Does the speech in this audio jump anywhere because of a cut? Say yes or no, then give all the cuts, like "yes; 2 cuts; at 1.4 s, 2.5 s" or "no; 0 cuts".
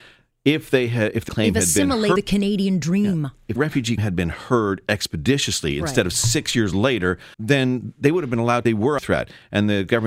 yes; 7 cuts; at 1.3 s, 2.2 s, 3.6 s, 4.0 s, 7.3 s, 8.6 s, 9.0 s